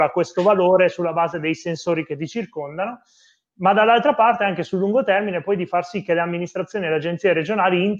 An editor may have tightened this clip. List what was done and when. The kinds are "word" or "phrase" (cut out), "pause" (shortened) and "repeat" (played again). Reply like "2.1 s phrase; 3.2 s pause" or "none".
none